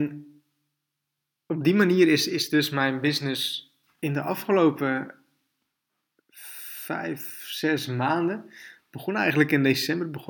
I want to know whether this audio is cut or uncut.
cut